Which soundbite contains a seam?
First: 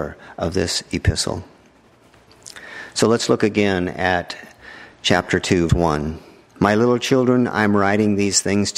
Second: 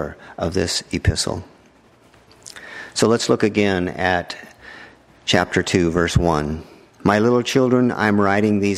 first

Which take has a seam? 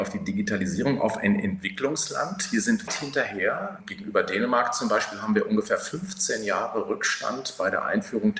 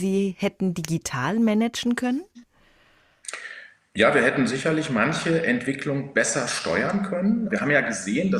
first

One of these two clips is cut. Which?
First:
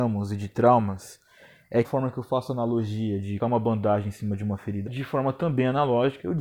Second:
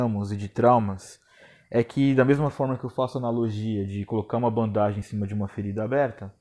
first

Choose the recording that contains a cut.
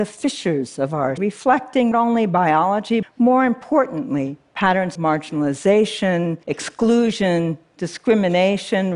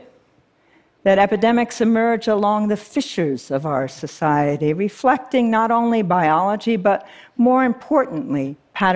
first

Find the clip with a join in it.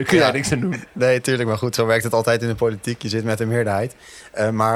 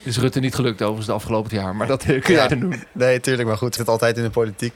second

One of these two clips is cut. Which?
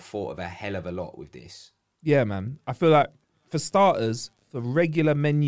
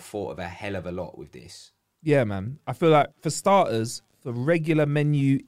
second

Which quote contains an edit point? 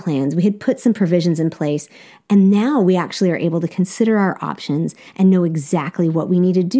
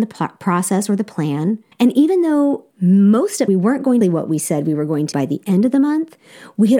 second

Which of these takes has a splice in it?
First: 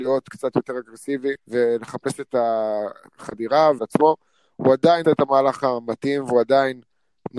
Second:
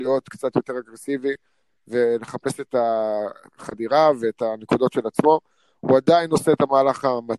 first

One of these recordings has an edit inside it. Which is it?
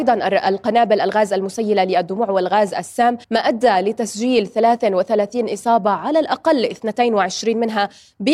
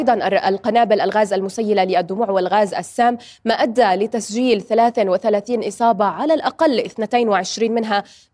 first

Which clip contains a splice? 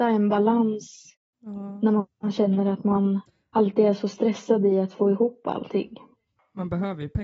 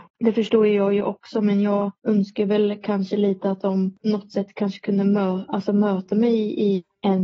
second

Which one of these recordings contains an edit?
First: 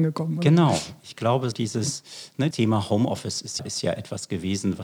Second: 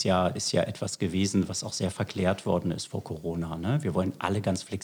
first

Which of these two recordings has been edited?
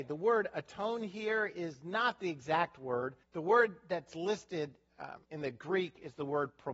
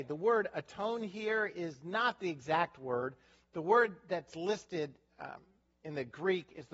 first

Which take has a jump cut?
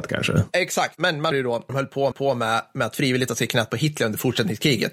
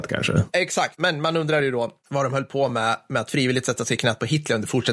first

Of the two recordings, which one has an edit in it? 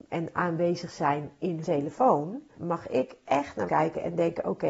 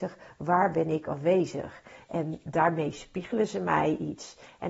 first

